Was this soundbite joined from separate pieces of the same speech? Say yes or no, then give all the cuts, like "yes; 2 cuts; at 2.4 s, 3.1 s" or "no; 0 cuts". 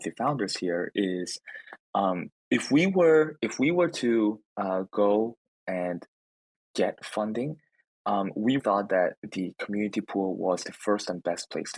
yes; 3 cuts; at 2.4 s, 4.5 s, 8.6 s